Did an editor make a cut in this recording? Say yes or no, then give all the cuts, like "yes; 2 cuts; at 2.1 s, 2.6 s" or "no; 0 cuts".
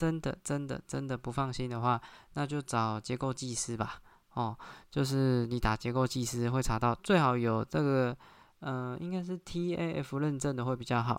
no; 0 cuts